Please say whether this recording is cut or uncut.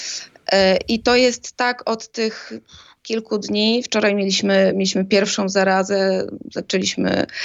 uncut